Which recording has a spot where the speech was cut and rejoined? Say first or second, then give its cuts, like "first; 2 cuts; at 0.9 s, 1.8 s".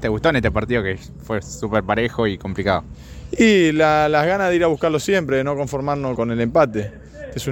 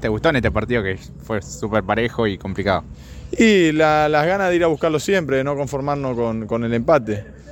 first; 1 cut; at 6.2 s